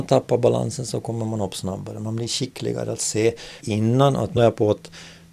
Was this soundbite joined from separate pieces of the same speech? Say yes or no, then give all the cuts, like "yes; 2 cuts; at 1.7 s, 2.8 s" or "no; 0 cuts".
yes; 2 cuts; at 3.6 s, 4.4 s